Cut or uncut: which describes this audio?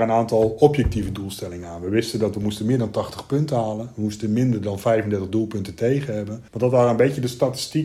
cut